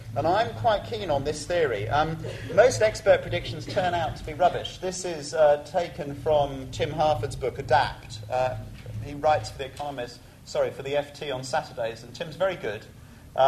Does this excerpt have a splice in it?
no; 0 cuts

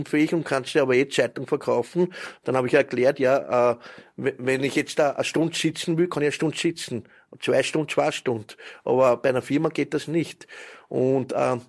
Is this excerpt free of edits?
yes; 0 cuts

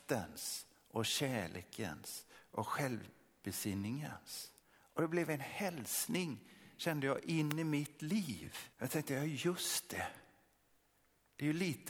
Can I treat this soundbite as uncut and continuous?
no; 2 cuts; at 4.6 s, 8.7 s

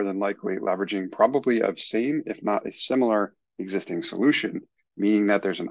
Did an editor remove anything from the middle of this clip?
no; 0 cuts

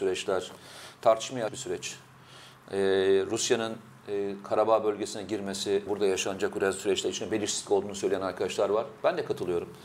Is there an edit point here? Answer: yes; 2 cuts; at 1.5 s, 5.9 s

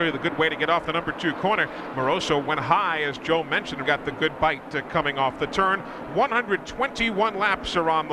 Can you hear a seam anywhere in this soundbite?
yes; 1 cut; at 3.8 s

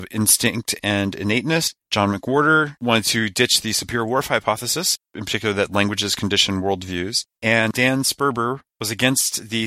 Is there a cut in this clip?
no; 0 cuts

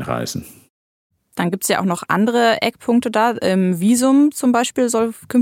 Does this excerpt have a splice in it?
no; 0 cuts

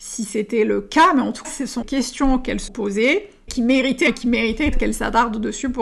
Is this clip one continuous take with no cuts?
no; 6 cuts; at 1.4 s, 1.8 s, 2.7 s, 3.5 s, 4.1 s, 4.7 s

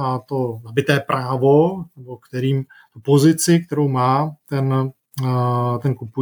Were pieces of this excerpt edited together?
no; 0 cuts

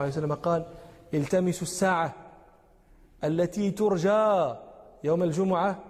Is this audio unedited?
yes; 0 cuts

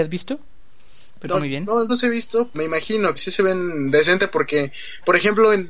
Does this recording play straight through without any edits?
no; 4 cuts; at 1.3 s, 1.9 s, 2.5 s, 3.2 s

